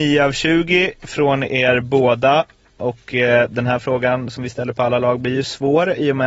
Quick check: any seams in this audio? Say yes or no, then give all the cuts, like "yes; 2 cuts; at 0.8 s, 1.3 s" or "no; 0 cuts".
no; 0 cuts